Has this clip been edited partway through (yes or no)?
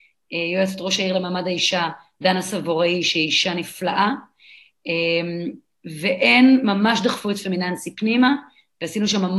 no